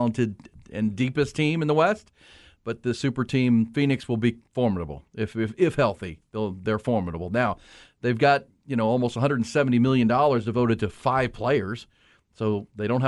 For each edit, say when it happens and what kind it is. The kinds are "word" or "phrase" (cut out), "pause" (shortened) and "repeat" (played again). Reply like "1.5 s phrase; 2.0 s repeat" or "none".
none